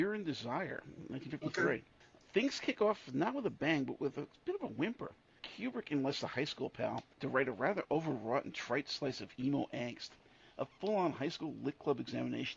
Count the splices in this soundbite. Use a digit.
0